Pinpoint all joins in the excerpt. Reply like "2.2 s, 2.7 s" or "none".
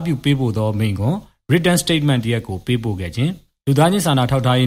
none